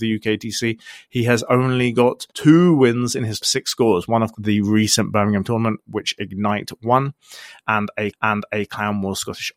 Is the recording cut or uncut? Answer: cut